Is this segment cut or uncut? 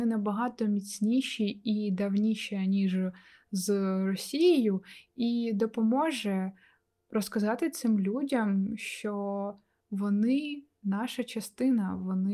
uncut